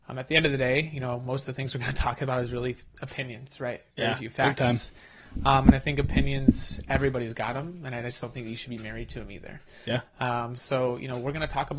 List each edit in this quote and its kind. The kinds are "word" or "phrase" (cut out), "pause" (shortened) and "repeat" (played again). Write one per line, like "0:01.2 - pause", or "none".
none